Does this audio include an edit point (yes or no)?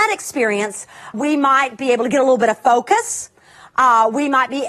yes